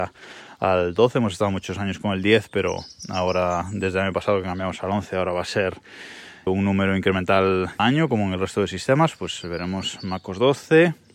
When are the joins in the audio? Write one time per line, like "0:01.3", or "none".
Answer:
0:06.5
0:07.8